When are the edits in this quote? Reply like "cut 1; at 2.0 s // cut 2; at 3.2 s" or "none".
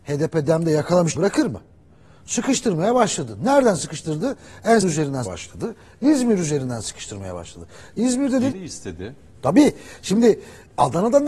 cut 1; at 1.1 s // cut 2; at 4.8 s // cut 3; at 5.2 s // cut 4; at 8.5 s